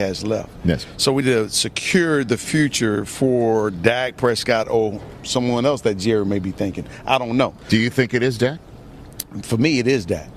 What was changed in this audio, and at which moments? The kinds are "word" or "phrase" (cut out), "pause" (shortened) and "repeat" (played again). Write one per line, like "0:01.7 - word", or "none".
0:01.2 - word